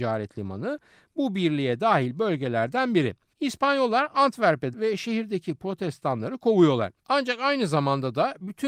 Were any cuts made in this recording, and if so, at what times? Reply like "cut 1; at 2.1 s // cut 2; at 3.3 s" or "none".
cut 1; at 3.3 s // cut 2; at 4.7 s // cut 3; at 7.0 s